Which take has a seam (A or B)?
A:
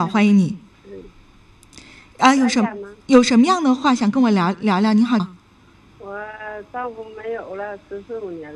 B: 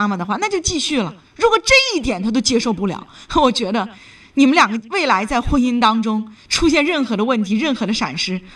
A